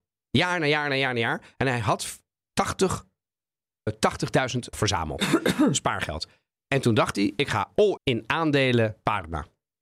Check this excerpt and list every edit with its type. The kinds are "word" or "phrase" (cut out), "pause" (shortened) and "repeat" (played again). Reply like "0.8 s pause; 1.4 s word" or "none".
3.9 s word; 4.7 s word; 8.0 s word